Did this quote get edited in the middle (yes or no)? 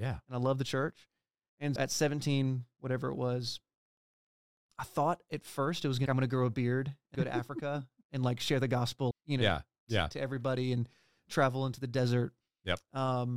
yes